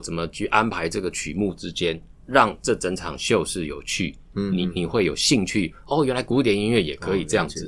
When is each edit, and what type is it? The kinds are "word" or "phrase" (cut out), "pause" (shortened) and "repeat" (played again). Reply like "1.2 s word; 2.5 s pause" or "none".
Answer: none